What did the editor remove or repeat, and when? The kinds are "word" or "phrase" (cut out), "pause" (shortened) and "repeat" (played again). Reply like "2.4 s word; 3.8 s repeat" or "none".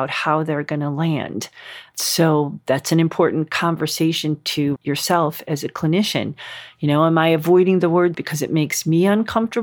4.8 s word; 8.1 s word